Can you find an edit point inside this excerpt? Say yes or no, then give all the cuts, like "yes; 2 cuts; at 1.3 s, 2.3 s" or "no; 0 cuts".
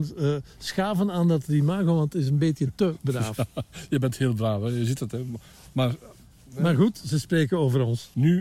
no; 0 cuts